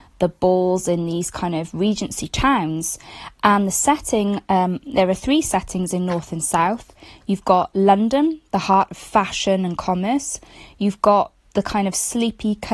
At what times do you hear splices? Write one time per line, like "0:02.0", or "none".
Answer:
none